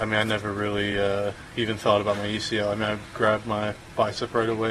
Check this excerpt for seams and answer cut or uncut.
uncut